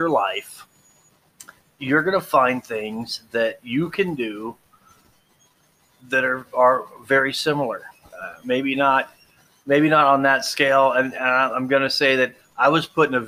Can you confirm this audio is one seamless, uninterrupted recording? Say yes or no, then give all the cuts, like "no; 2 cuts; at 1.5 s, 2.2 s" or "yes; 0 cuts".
yes; 0 cuts